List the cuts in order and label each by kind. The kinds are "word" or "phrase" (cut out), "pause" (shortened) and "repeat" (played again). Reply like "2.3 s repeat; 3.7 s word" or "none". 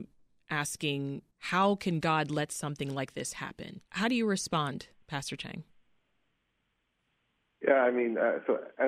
1.3 s pause; 3.9 s pause